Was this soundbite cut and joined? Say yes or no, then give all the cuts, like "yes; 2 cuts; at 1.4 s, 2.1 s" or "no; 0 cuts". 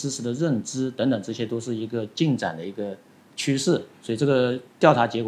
no; 0 cuts